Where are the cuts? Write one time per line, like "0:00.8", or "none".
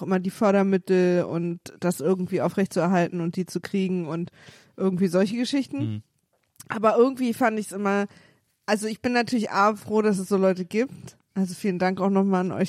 none